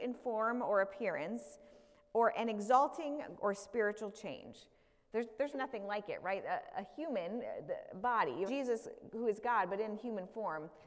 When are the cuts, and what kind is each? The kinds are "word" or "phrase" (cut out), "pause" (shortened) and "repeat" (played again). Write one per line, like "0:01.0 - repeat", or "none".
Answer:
0:03.4 - word
0:05.5 - word
0:08.5 - word